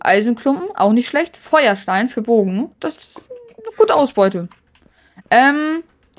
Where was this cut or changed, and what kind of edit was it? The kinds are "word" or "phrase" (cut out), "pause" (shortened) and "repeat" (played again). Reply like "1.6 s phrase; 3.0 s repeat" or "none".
2.7 s pause